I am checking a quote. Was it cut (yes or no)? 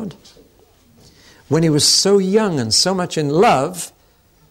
no